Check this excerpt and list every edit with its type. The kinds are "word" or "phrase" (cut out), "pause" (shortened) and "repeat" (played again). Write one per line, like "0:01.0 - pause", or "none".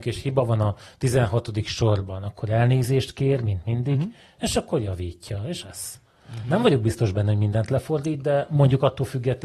0:05.6 - phrase